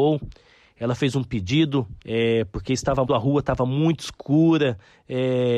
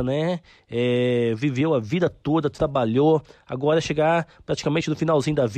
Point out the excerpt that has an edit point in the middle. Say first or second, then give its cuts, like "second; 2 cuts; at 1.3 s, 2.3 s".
first; 2 cuts; at 2.0 s, 3.1 s